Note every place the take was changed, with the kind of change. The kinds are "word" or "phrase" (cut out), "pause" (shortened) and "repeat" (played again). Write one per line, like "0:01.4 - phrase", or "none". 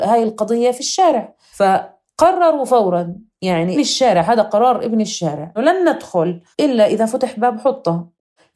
0:03.7 - word
0:05.6 - word
0:06.5 - pause

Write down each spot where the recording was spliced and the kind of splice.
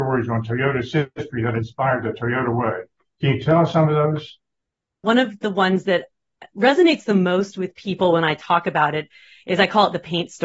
none

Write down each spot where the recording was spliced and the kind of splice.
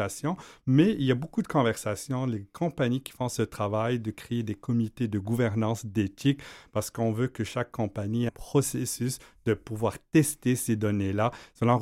0:08.3 - word

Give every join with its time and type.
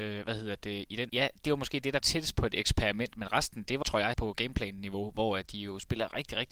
0:01.1 - word
0:02.0 - word
0:03.8 - word
0:04.1 - word

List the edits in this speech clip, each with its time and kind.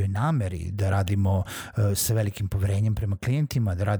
none

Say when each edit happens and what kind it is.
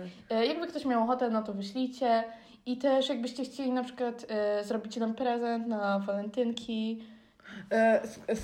none

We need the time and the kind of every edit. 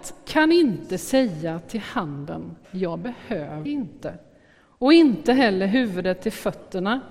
0:02.6 - pause
0:03.7 - word

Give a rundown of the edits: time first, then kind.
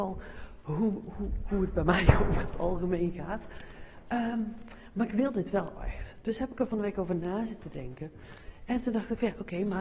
none

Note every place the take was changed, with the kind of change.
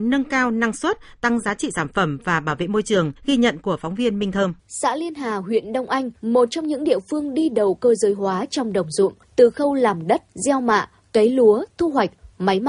0:03.2 - pause
0:04.6 - pause
0:06.2 - pause
0:09.2 - pause
0:10.3 - pause

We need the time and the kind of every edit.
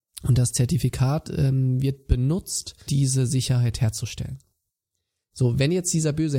0:02.9 - word

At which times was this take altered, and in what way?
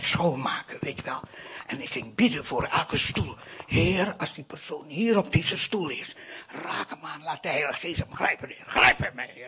none

